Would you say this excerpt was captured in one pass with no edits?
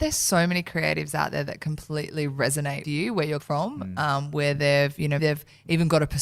no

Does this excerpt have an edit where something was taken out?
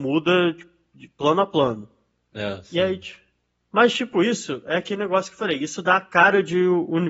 no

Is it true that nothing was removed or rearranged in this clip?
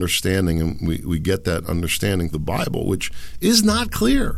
no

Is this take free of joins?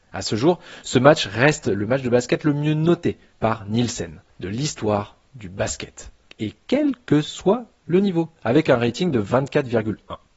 no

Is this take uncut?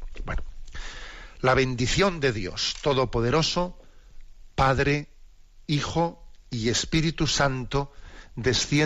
yes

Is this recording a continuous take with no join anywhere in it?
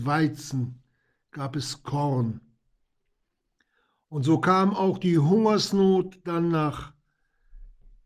yes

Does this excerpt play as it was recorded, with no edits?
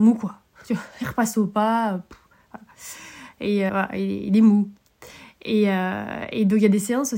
no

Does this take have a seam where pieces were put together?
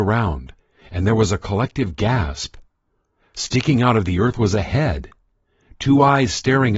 no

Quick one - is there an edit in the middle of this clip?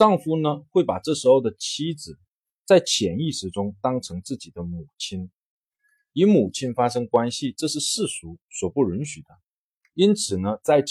no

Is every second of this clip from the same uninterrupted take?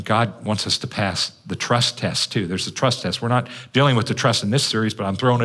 no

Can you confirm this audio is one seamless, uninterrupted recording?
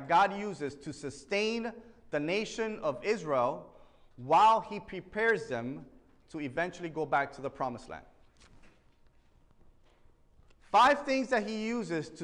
yes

